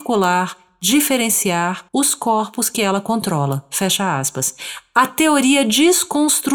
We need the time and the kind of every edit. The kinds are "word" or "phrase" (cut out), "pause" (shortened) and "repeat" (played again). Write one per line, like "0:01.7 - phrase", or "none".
0:01.9 - pause